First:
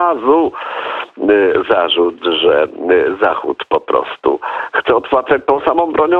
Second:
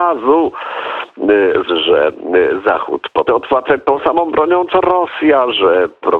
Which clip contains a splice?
second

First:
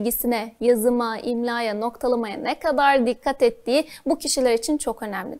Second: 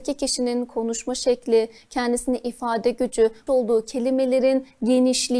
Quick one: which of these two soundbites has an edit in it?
second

